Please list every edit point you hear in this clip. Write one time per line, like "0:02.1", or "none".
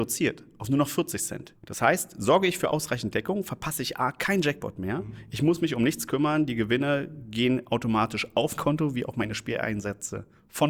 0:08.6